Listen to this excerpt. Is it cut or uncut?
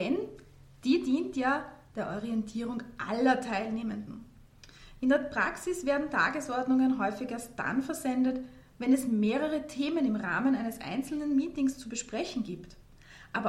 uncut